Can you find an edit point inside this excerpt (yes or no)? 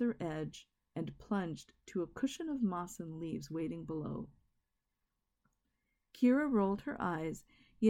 no